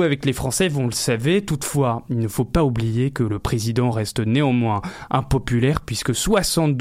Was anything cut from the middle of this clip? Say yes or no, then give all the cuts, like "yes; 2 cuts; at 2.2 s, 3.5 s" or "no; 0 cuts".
no; 0 cuts